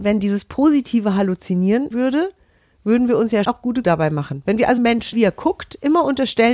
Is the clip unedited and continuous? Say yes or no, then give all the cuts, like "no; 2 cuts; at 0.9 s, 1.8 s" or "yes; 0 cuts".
no; 5 cuts; at 1.9 s, 3.4 s, 3.8 s, 4.8 s, 5.1 s